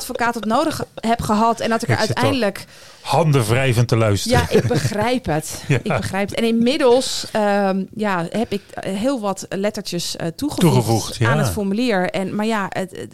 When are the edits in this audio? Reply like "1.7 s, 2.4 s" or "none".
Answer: none